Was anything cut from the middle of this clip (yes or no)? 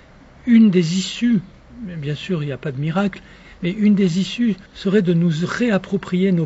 yes